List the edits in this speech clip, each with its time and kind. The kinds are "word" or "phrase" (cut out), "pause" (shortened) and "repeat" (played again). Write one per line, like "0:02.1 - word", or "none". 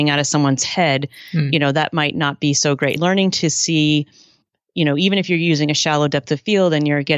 0:03.0 - word